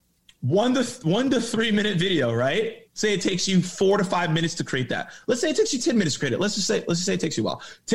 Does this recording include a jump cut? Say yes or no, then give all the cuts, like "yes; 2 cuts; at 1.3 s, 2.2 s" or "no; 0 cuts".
yes; 1 cut; at 2.9 s